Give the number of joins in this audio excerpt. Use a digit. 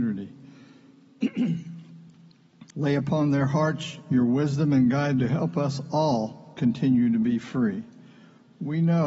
2